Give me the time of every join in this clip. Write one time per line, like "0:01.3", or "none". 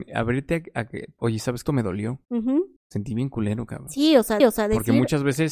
0:01.2
0:01.6
0:02.2
0:02.8
0:04.4